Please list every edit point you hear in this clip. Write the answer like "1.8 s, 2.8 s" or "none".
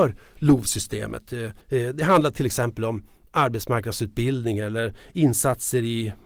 1.6 s